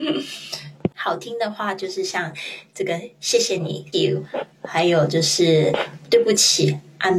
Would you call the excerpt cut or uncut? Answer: cut